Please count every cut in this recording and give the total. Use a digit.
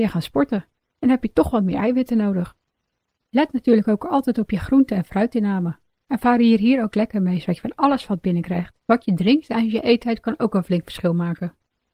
1